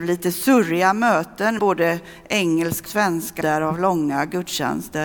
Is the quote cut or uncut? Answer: cut